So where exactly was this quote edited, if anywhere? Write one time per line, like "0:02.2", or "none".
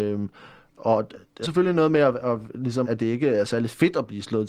0:01.4
0:02.8